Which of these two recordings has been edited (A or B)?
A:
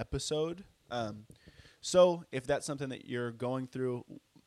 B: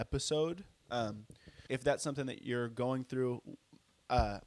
B